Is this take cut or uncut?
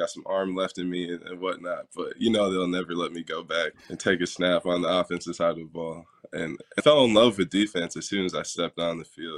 cut